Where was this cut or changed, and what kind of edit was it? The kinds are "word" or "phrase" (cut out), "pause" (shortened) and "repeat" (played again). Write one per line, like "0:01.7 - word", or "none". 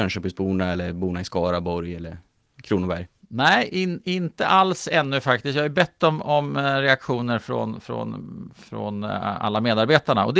none